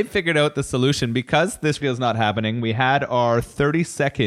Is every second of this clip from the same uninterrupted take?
no; 1 cut; at 1.8 s

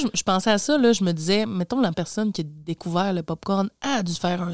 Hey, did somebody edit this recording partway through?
yes; 1 cut; at 1.9 s

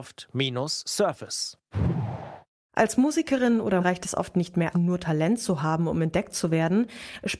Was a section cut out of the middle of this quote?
yes; 2 cuts; at 3.8 s, 4.7 s

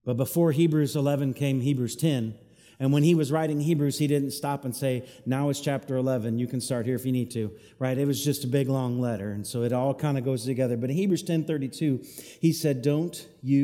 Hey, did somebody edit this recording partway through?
no; 0 cuts

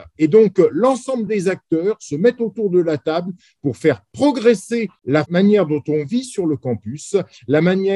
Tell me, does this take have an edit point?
no; 0 cuts

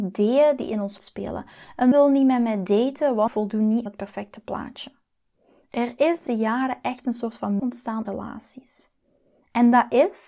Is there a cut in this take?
yes; 7 cuts; at 1.0 s, 1.9 s, 3.3 s, 3.9 s, 6.3 s, 7.6 s, 8.1 s

